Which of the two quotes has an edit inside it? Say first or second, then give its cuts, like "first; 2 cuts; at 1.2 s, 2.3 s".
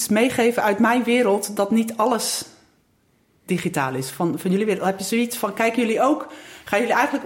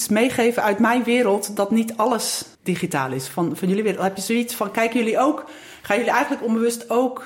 second; 1 cut; at 2.5 s